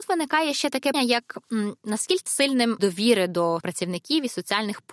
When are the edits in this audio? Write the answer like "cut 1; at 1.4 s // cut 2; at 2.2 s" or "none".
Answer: cut 1; at 0.9 s // cut 2; at 2.3 s // cut 3; at 2.8 s // cut 4; at 3.6 s